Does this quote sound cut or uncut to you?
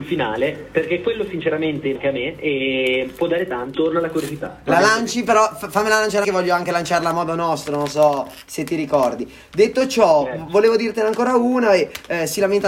cut